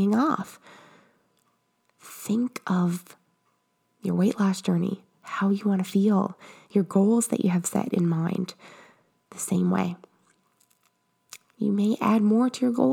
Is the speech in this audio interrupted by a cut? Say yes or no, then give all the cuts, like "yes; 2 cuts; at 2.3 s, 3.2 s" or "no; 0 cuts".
no; 0 cuts